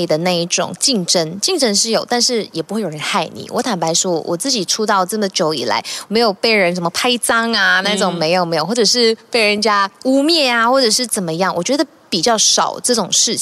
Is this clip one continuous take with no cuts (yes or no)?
yes